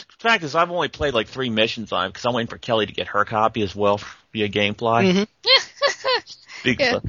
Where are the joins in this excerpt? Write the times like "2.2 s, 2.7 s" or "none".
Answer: none